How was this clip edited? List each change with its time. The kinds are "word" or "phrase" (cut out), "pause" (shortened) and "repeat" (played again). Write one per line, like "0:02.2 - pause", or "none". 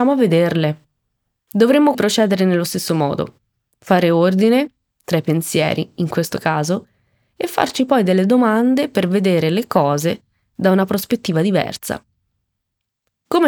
0:01.9 - word